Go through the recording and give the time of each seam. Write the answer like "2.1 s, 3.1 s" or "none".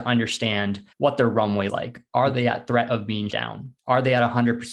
0.9 s, 1.7 s, 3.3 s, 3.8 s

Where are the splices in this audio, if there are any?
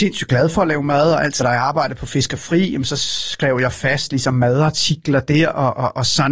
1.4 s

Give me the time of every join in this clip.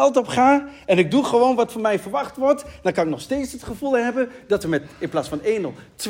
none

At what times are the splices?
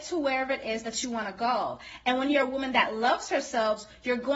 none

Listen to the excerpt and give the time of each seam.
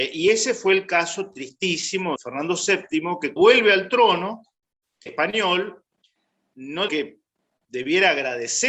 2.2 s, 3.4 s, 5.1 s, 6.9 s

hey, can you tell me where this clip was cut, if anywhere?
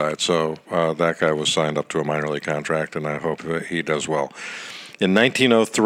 none

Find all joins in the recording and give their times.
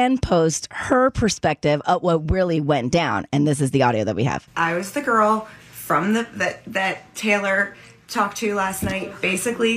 none

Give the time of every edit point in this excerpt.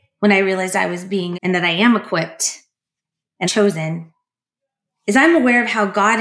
1.3 s, 3.4 s

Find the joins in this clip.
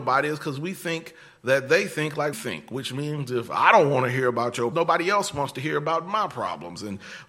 2.3 s, 4.7 s

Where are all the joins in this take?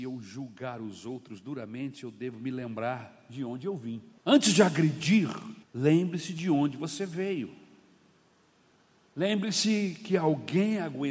4.2 s, 5.6 s

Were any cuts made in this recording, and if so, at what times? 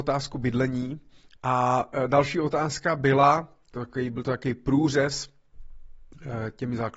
none

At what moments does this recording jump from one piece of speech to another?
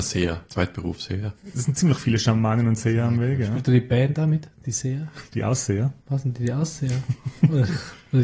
5.3 s, 6.0 s

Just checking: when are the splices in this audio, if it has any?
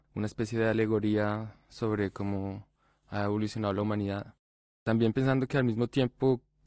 none

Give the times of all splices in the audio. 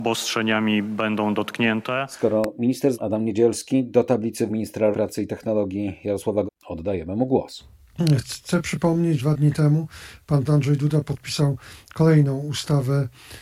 2.9 s, 4.5 s, 4.9 s, 6.5 s, 9.2 s, 10.4 s

